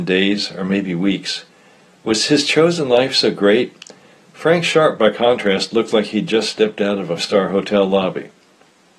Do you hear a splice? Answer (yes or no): yes